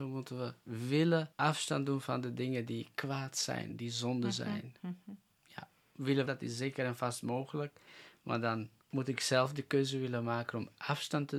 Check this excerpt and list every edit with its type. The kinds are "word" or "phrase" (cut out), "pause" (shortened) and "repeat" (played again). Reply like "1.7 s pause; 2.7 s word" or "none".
6.3 s phrase